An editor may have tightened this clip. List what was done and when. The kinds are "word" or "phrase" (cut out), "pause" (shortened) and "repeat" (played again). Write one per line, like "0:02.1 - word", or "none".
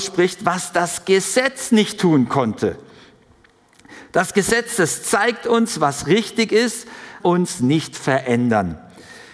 0:07.2 - phrase